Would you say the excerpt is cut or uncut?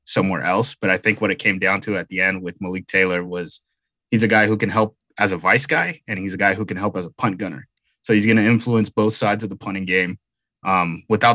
uncut